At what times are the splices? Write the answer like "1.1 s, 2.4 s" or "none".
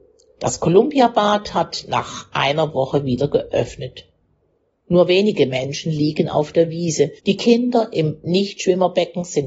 7.2 s